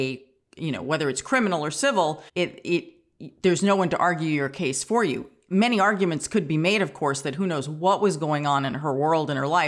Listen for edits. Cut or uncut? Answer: cut